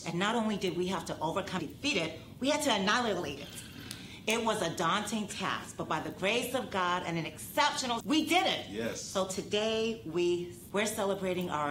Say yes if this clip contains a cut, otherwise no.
yes